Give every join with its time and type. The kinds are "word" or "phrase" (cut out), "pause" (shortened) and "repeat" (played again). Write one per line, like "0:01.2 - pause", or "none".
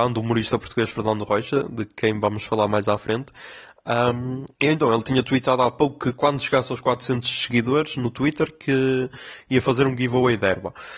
0:04.5 - pause